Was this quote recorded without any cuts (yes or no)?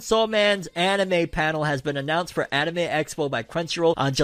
yes